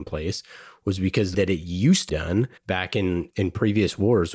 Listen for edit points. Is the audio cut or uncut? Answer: cut